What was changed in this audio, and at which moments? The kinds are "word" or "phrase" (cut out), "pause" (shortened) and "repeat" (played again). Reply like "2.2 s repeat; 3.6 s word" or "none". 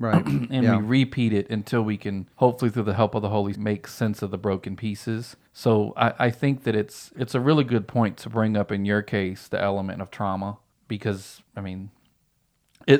2.3 s pause; 3.5 s word; 5.5 s pause; 7.1 s word; 11.5 s pause